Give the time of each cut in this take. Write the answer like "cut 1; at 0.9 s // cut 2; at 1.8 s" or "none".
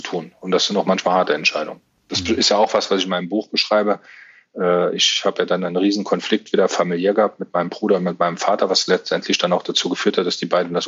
none